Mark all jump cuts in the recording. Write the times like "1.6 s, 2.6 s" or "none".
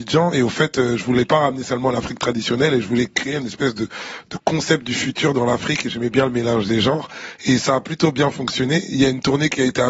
none